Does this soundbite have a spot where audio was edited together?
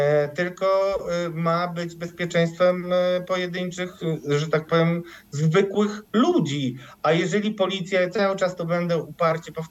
yes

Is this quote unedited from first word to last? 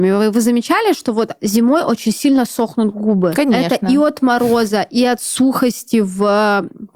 yes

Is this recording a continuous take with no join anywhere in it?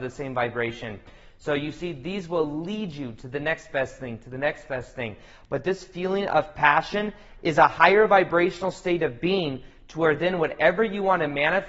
yes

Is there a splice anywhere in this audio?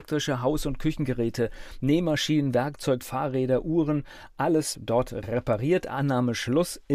yes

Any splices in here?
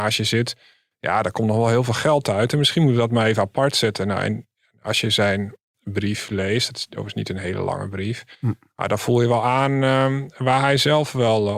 no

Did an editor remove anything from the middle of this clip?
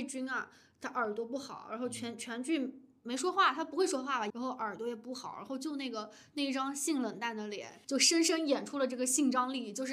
yes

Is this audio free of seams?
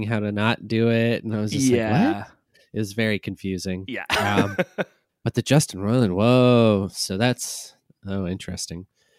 yes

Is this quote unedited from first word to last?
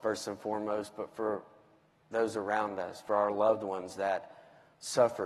yes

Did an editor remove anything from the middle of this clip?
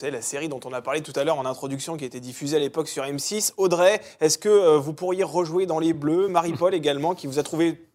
no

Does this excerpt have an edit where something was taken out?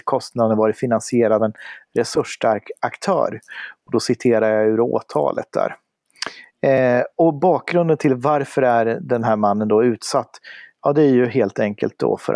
yes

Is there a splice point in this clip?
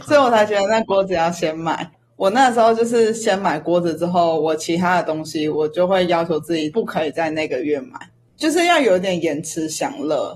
no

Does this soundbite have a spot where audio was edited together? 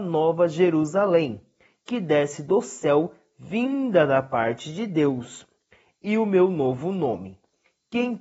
no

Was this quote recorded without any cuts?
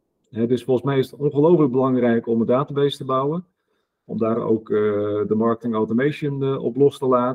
yes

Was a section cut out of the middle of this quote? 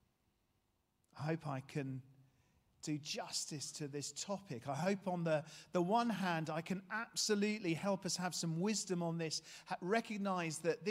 no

